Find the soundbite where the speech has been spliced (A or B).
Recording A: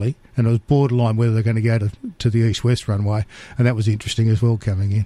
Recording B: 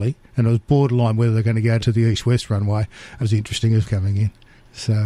B